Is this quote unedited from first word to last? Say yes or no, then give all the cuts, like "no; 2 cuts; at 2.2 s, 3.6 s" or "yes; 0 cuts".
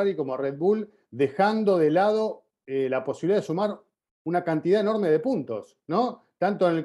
yes; 0 cuts